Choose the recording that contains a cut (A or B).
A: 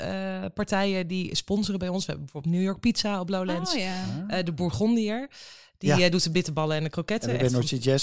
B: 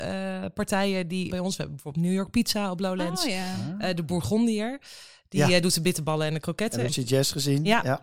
B